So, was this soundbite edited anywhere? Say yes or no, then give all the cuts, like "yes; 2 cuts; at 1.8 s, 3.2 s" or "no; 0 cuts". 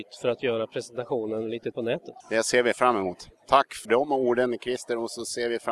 yes; 3 cuts; at 1.7 s, 2.2 s, 3.8 s